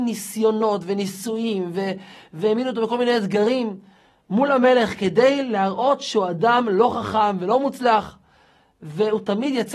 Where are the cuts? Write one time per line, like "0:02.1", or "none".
none